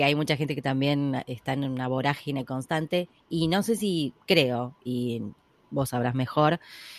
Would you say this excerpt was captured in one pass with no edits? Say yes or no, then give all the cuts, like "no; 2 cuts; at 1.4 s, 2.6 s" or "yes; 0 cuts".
yes; 0 cuts